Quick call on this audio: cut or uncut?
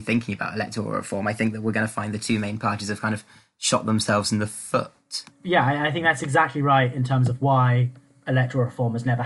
uncut